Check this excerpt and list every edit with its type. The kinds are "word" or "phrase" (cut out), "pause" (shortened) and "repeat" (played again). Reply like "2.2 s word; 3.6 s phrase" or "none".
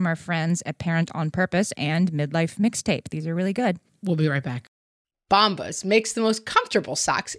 none